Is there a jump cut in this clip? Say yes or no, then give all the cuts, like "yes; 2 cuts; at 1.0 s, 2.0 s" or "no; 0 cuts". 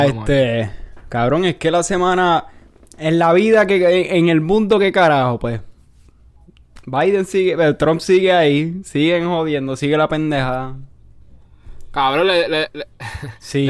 no; 0 cuts